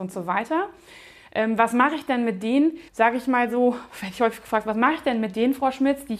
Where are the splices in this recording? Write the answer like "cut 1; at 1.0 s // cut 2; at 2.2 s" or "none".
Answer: cut 1; at 2.9 s